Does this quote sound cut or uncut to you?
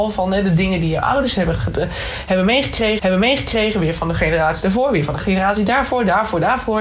cut